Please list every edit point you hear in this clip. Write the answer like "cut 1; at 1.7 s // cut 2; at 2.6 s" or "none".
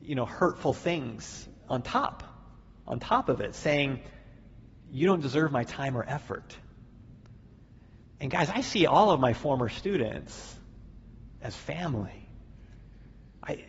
cut 1; at 1.7 s